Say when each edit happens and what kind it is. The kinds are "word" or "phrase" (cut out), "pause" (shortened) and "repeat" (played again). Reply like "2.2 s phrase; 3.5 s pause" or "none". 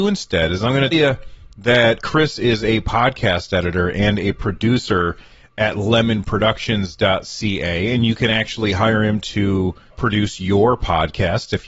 0.9 s word; 2.0 s word; 9.9 s word